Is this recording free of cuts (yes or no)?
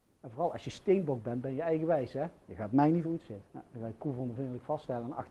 no